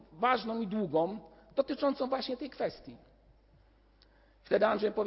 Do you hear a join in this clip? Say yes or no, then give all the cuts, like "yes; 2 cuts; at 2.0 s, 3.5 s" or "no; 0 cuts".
no; 0 cuts